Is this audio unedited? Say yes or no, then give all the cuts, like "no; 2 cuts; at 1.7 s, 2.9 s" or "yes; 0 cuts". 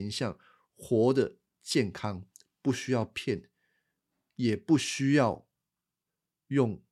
yes; 0 cuts